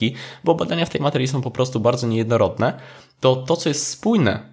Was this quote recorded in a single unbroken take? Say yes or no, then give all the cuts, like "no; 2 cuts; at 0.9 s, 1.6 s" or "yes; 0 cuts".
yes; 0 cuts